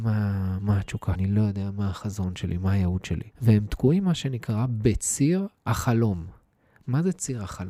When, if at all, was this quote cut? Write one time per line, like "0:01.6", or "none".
0:01.1
0:03.3